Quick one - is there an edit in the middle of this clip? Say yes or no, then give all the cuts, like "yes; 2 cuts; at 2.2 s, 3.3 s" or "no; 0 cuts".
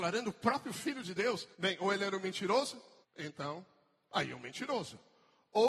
yes; 2 cuts; at 1.5 s, 3.0 s